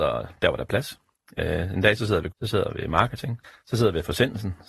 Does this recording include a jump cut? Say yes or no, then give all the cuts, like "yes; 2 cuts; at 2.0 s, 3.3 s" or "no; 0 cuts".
yes; 2 cuts; at 2.3 s, 3.4 s